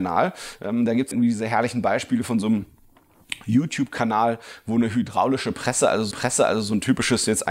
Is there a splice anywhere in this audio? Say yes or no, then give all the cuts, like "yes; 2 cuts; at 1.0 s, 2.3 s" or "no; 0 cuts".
yes; 2 cuts; at 1.1 s, 6.1 s